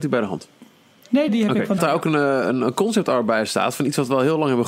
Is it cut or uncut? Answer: cut